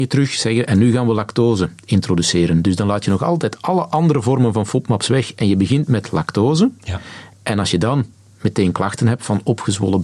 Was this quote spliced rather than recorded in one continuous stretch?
no; 0 cuts

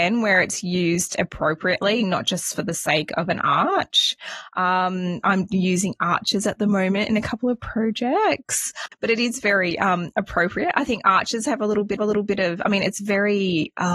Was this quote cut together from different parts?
yes; 1 cut; at 12.0 s

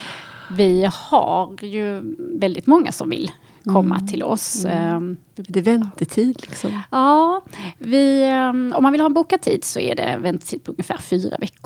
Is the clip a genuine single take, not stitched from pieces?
yes; 0 cuts

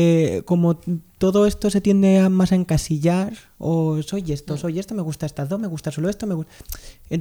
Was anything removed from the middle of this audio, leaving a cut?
no; 0 cuts

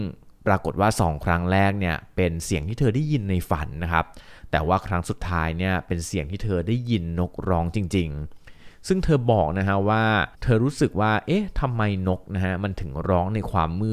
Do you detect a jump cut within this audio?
yes; 1 cut; at 10.3 s

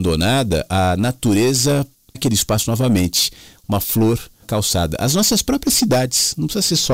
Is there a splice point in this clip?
yes; 2 cuts; at 2.1 s, 4.4 s

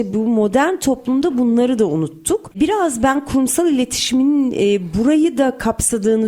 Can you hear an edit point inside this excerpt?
no; 0 cuts

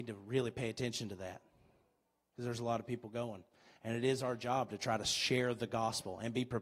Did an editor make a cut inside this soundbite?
no; 0 cuts

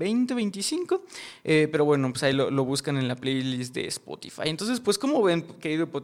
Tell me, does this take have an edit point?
no; 0 cuts

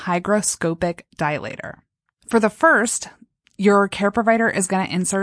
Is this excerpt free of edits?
yes; 0 cuts

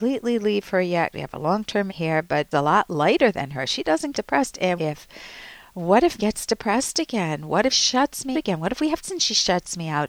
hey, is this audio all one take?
no; 9 cuts; at 1.1 s, 1.9 s, 2.5 s, 4.1 s, 4.8 s, 6.2 s, 7.7 s, 8.3 s, 9.0 s

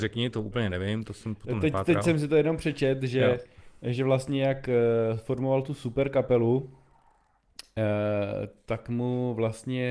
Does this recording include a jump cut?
no; 0 cuts

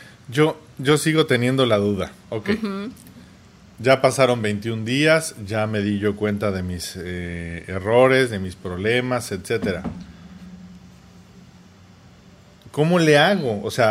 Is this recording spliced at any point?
no; 0 cuts

